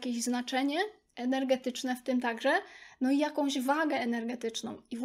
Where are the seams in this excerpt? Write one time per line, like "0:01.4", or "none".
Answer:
none